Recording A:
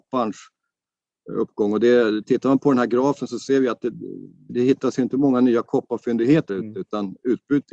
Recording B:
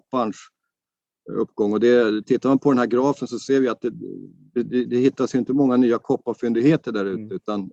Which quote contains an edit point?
A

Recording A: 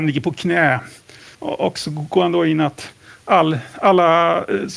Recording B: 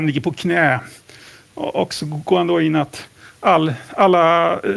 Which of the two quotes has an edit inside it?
A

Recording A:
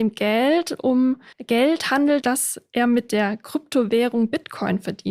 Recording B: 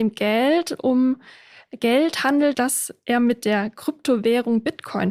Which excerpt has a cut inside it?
A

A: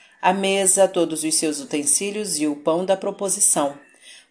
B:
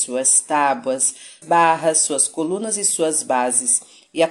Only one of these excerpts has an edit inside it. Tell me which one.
B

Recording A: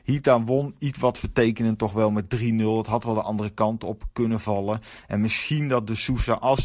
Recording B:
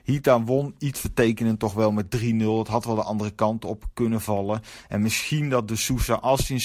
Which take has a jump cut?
B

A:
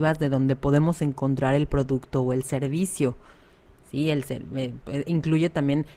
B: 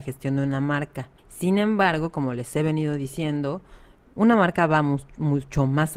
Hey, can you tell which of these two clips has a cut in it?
B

